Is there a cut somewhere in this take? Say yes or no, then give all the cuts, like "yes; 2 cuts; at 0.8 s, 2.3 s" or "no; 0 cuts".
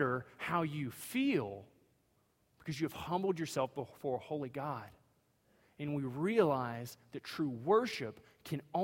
no; 0 cuts